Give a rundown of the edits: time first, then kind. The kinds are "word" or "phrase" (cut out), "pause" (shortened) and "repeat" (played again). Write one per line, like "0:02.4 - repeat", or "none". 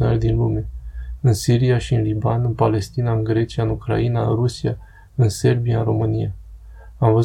none